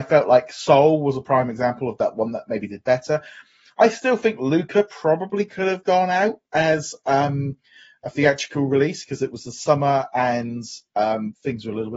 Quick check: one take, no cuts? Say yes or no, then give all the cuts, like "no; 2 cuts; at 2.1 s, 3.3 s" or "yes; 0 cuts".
yes; 0 cuts